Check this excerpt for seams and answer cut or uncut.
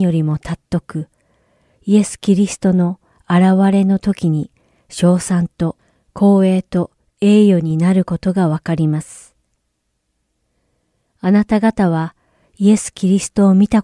uncut